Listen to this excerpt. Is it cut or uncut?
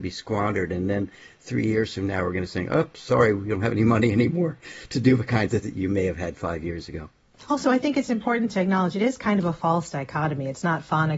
cut